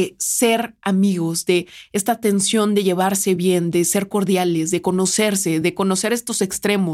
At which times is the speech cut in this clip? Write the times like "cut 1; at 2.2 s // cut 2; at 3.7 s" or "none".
none